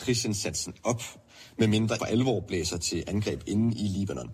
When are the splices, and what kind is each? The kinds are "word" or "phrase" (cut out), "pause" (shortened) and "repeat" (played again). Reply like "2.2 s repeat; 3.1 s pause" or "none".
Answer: 2.0 s phrase